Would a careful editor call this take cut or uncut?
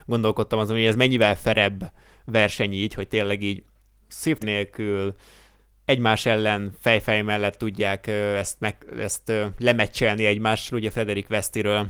cut